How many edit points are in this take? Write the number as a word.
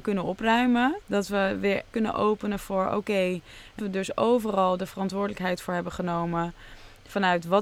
three